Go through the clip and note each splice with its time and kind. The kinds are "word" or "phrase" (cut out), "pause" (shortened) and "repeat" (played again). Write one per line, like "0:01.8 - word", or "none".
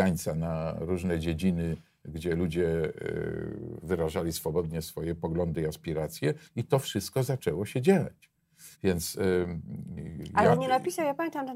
0:04.8 - word
0:06.5 - pause
0:08.7 - pause